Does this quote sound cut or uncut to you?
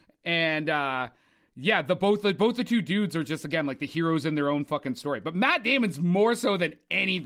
uncut